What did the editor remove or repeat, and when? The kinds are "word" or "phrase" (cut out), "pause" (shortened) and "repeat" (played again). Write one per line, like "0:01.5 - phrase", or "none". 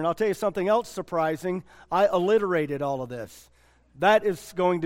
none